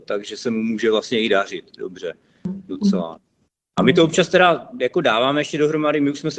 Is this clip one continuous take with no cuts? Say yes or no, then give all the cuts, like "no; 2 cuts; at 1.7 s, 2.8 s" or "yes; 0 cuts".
yes; 0 cuts